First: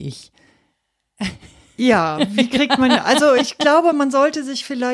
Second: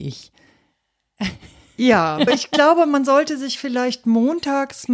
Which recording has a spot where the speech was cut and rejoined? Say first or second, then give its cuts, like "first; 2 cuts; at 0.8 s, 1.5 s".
second; 1 cut; at 2.3 s